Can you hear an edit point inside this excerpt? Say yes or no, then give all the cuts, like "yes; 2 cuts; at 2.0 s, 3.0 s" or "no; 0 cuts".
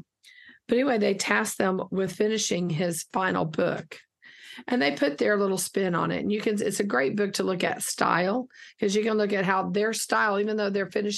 no; 0 cuts